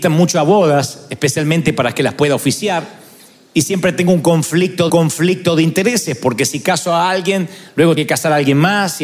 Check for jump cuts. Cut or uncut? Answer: cut